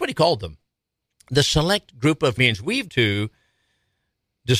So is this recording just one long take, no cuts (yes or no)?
no